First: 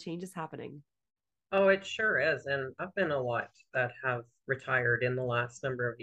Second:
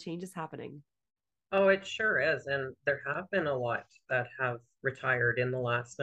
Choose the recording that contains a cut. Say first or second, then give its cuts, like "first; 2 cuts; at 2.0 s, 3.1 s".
first; 1 cut; at 2.8 s